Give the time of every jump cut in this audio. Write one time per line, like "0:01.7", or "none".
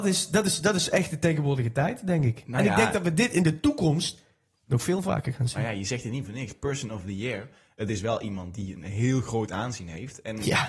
none

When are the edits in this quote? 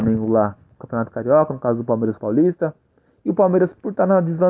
0:02.2

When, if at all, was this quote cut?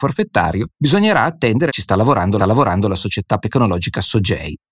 0:01.7
0:02.4
0:03.4

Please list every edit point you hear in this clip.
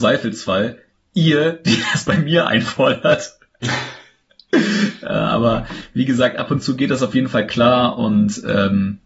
none

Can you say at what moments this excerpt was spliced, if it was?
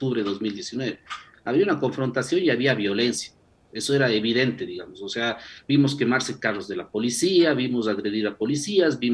none

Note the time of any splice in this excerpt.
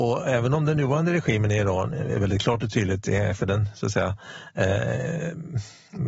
none

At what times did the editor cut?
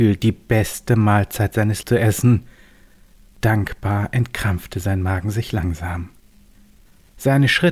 0:01.8

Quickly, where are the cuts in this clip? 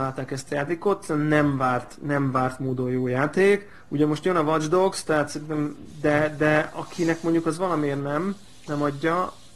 none

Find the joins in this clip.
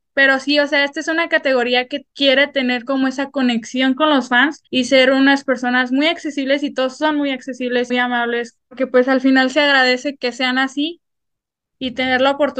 0:02.1
0:04.7
0:07.9
0:08.7
0:10.2

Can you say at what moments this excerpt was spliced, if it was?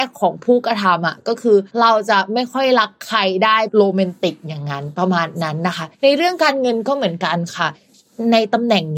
0:01.7
0:05.9

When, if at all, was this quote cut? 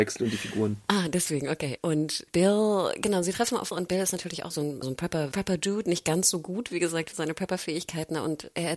0:03.7
0:04.5
0:04.8
0:05.3
0:07.1

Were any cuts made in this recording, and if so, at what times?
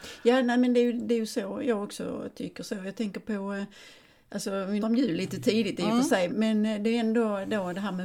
0:04.8
0:06.3

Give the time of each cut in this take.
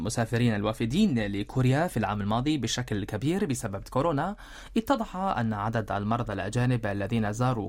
0:03.8

